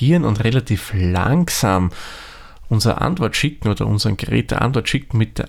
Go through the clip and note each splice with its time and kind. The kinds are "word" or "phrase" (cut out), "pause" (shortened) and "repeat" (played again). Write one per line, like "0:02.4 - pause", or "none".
none